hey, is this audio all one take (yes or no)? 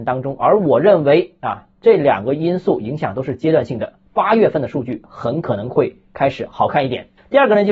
yes